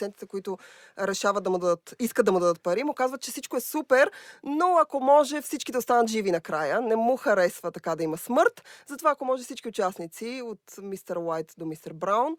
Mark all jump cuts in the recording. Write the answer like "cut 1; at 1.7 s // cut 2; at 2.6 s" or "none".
none